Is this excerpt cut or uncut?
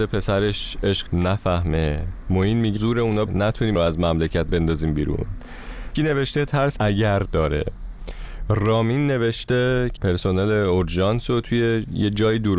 cut